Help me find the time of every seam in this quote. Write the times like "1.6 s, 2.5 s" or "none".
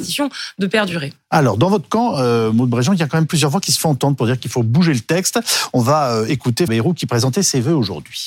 6.7 s